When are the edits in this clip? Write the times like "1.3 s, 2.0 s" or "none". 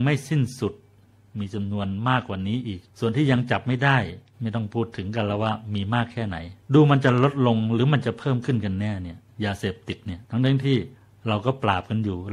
2.9 s, 6.6 s, 10.2 s

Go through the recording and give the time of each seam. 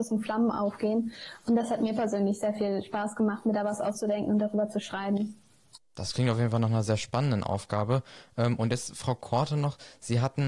5.8 s

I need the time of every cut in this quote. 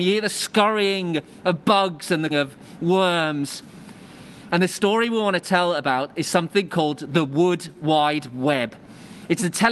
2.3 s

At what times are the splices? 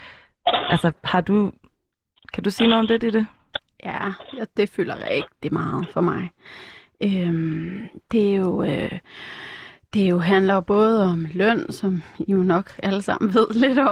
none

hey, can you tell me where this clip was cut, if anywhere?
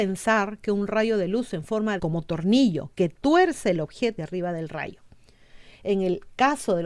2.0 s, 4.2 s

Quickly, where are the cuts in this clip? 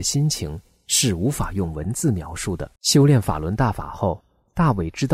2.8 s

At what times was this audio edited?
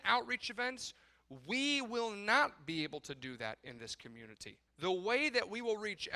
4.7 s

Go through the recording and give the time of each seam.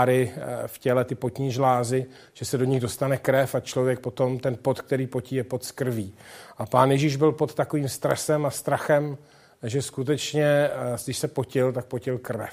none

